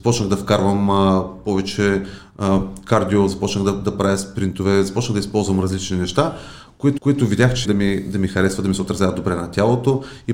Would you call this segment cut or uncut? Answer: cut